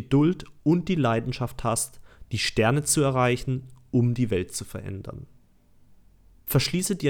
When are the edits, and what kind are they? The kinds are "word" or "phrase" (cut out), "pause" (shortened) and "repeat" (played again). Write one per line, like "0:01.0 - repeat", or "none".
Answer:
none